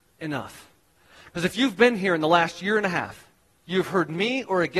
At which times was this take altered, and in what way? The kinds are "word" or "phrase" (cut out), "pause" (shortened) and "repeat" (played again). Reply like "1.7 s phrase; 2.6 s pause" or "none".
none